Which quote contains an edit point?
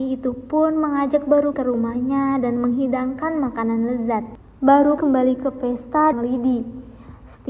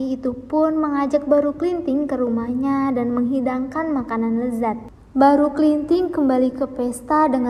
first; 3 cuts; at 1.5 s, 5.0 s, 6.1 s

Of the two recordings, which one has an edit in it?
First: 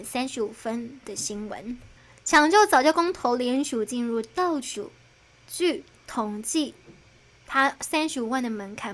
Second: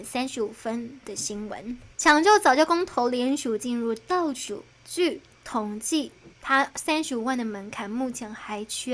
second; 3 cuts; at 1.9 s, 4.7 s, 6.3 s

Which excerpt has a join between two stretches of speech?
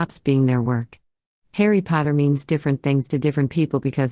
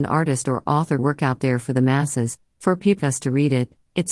second; 2 cuts; at 1.0 s, 3.0 s

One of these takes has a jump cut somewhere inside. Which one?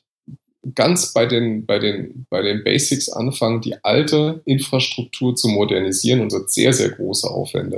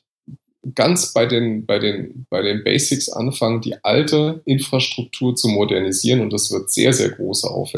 first; 1 cut; at 6.3 s

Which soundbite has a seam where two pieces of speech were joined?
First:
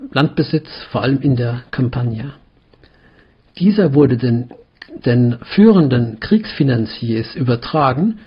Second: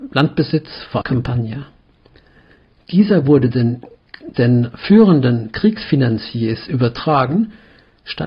second; 1 cut; at 1.0 s

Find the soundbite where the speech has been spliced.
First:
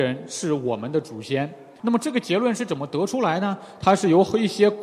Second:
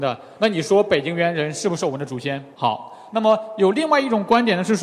second; 1 cut; at 2.5 s

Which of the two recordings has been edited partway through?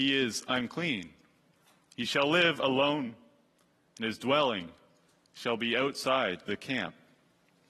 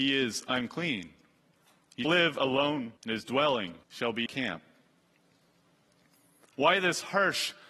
second; 4 cuts; at 2.0 s, 3.0 s, 3.8 s, 4.3 s

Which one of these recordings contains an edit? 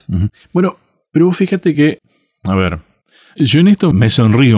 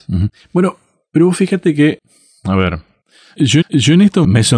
second; 1 cut; at 3.6 s

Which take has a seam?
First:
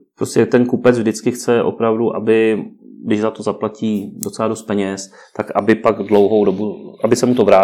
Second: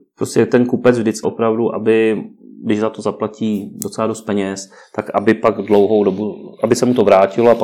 second; 1 cut; at 1.2 s

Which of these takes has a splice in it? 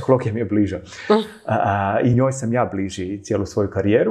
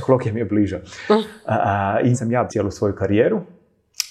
second; 2 cuts; at 2.1 s, 2.5 s

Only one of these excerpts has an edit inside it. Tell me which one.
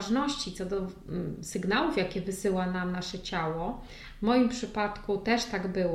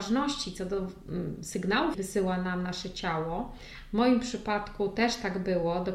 second; 1 cut; at 1.9 s

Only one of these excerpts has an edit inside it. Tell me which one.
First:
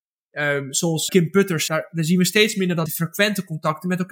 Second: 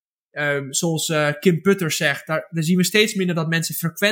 first; 3 cuts; at 1.1 s, 1.7 s, 2.9 s

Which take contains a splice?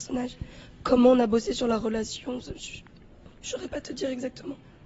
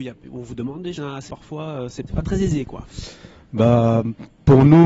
second; 3 cuts; at 1.0 s, 1.3 s, 2.1 s

